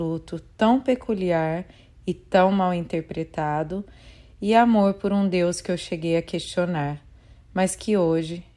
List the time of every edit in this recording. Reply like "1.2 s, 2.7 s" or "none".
none